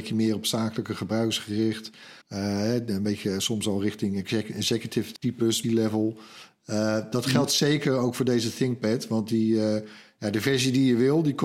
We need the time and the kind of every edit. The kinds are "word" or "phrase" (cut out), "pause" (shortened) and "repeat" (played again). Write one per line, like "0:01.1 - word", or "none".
0:02.2 - pause
0:05.2 - word
0:05.6 - word

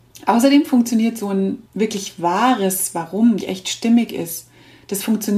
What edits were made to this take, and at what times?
0:01.7 - pause
0:03.4 - phrase

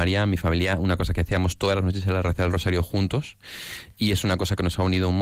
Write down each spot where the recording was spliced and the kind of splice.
none

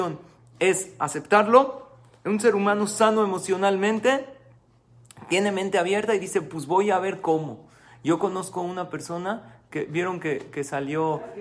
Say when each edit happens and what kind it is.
none

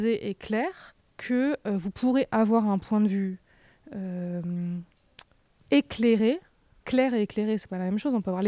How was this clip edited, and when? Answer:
0:01.0 - pause
0:06.8 - word

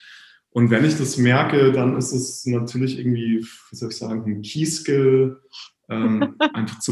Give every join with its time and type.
none

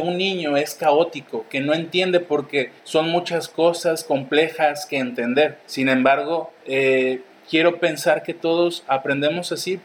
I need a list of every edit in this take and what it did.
0:02.8 - pause
0:05.6 - pause
0:06.6 - pause

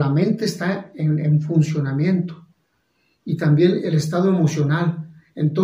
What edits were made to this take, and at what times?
none

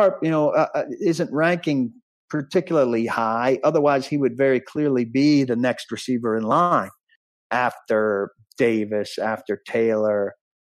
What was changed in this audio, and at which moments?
none

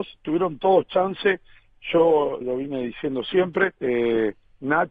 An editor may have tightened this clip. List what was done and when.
0:02.4 - word
0:03.8 - pause

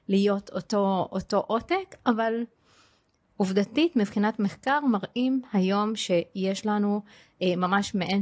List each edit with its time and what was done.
none

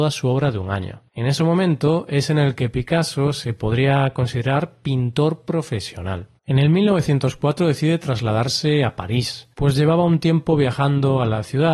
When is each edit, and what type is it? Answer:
0:01.1 - pause
0:06.4 - pause
0:09.5 - pause

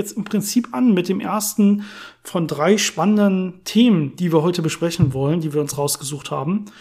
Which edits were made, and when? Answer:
none

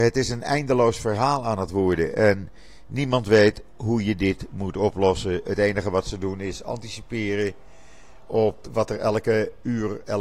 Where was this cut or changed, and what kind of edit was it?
0:08.6 - word

